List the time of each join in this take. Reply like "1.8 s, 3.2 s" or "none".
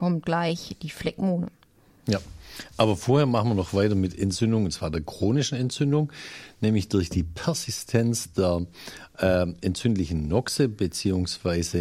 none